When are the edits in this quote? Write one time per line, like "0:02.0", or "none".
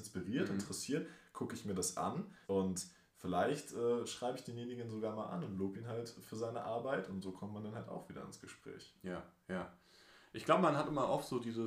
0:02.4